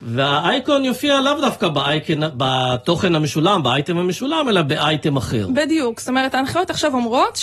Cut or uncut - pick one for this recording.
uncut